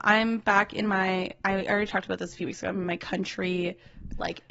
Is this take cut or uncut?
uncut